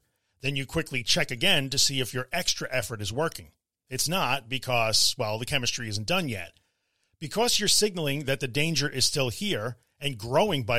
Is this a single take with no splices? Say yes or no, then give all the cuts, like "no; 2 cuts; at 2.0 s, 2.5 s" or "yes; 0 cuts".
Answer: yes; 0 cuts